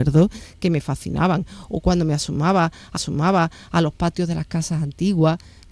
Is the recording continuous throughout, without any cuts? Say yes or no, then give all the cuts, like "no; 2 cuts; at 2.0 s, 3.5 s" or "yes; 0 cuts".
no; 1 cut; at 3.0 s